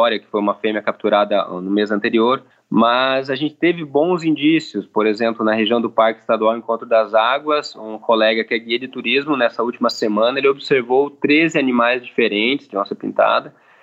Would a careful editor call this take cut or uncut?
cut